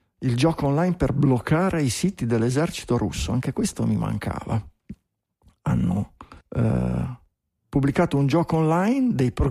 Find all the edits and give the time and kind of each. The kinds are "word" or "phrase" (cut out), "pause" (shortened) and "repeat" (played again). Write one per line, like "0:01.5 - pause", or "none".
0:06.4 - pause